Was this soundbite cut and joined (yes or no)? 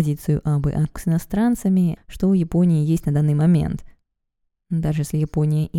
yes